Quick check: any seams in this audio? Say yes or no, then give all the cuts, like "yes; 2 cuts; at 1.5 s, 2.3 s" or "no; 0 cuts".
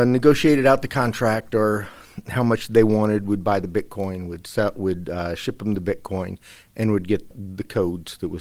no; 0 cuts